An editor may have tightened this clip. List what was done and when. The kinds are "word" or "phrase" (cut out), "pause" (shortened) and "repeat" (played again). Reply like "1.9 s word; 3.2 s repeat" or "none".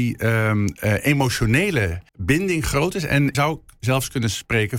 2.1 s pause; 3.3 s word